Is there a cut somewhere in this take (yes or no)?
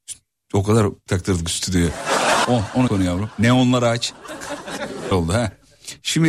yes